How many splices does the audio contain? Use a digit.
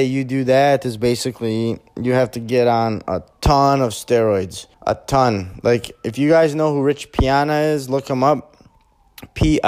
1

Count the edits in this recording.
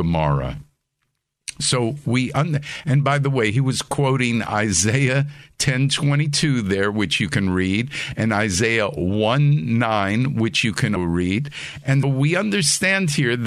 2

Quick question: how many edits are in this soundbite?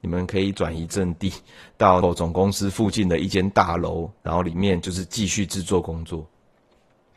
2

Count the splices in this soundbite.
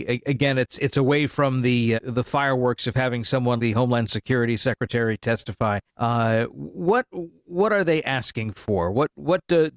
3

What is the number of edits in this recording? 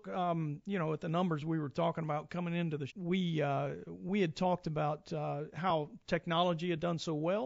1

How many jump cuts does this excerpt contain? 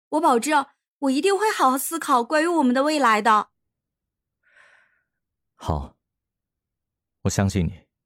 0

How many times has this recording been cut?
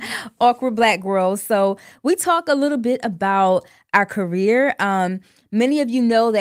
0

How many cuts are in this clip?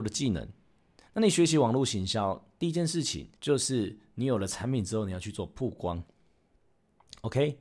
1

